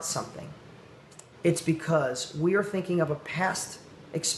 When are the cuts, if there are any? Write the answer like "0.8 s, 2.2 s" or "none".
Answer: 1.3 s